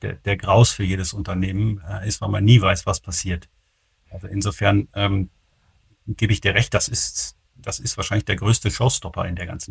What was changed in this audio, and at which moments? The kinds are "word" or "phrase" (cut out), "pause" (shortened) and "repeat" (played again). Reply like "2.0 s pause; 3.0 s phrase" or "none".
none